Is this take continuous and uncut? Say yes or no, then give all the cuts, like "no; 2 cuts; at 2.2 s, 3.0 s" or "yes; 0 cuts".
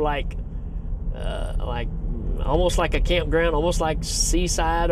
yes; 0 cuts